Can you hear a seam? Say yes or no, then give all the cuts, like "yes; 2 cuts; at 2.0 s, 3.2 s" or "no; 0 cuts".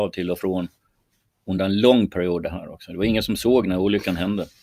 no; 0 cuts